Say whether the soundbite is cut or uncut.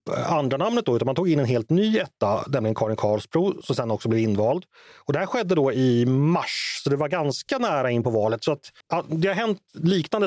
cut